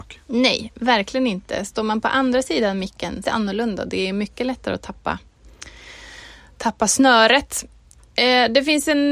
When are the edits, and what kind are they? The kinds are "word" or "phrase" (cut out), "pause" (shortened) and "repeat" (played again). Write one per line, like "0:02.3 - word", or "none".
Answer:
0:03.2 - phrase